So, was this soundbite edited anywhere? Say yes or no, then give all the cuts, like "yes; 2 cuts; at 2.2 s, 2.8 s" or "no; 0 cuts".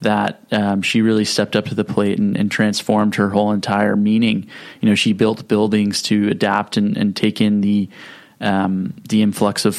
no; 0 cuts